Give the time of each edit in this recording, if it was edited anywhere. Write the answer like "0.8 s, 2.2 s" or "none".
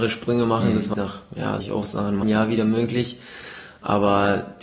0.9 s, 1.6 s, 2.2 s